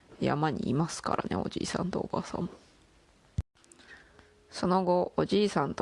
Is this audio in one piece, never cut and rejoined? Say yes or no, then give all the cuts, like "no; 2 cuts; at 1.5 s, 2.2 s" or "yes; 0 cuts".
yes; 0 cuts